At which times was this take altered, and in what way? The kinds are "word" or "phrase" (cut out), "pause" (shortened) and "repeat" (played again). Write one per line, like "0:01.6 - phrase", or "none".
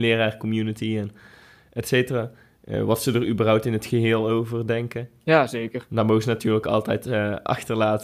none